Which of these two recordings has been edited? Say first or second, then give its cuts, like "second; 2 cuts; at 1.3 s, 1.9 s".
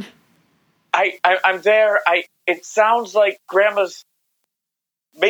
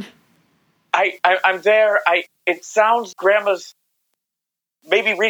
second; 1 cut; at 3.1 s